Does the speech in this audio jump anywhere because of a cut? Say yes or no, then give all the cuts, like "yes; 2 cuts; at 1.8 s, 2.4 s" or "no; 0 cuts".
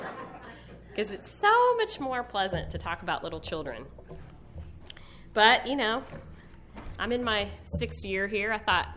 no; 0 cuts